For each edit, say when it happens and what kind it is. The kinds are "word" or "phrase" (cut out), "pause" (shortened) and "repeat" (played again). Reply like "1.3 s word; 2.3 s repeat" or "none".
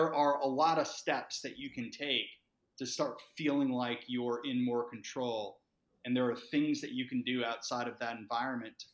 none